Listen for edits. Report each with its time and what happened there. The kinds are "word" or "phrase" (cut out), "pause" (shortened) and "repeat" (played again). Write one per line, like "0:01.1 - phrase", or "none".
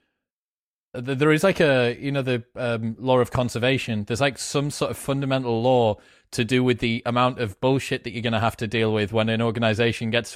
none